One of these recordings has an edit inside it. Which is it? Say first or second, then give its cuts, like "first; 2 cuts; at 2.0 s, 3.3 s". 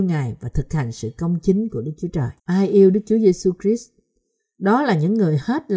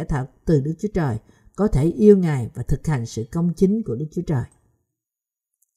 first; 1 cut; at 2.4 s